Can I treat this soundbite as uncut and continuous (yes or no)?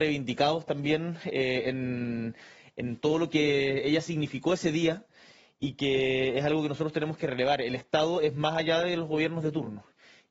yes